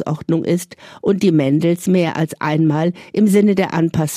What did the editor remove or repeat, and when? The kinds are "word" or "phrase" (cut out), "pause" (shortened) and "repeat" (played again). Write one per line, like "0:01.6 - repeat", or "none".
none